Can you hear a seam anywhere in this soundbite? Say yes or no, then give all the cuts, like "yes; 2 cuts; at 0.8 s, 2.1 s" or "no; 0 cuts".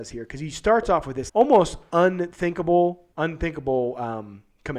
yes; 2 cuts; at 1.3 s, 3.1 s